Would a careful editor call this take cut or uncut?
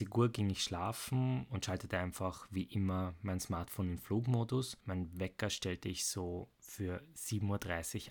uncut